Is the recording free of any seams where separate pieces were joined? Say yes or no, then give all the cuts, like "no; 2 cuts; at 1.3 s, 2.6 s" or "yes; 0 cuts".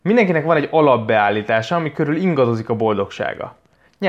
yes; 0 cuts